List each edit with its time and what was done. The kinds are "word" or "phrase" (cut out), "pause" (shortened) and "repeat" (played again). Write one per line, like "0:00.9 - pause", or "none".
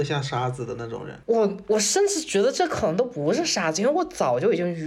0:01.2 - pause